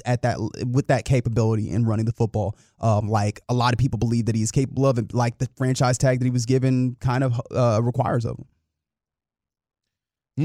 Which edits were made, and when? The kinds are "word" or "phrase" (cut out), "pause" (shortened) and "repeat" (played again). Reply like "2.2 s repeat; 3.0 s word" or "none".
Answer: none